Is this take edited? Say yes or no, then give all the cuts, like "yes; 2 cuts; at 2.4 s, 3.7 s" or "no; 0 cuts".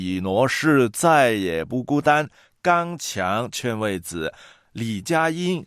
no; 0 cuts